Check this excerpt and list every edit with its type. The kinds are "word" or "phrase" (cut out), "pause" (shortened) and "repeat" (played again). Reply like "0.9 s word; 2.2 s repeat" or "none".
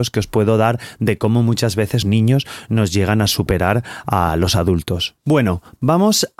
2.0 s word; 5.2 s pause